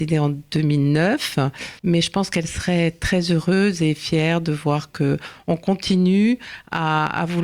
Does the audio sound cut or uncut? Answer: cut